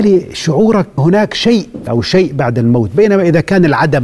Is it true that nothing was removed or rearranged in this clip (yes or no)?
no